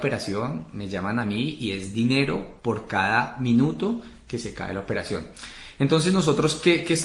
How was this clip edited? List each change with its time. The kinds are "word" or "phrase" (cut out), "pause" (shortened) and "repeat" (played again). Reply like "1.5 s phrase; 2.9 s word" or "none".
none